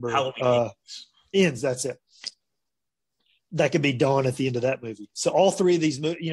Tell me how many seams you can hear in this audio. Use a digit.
0